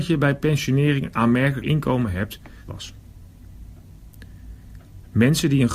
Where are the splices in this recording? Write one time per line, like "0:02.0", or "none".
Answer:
0:01.6
0:02.7